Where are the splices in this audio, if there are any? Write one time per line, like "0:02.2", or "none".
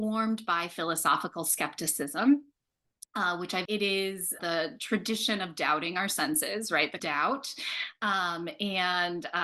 0:03.7
0:04.4
0:07.0